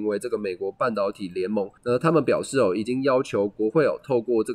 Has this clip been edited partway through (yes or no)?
yes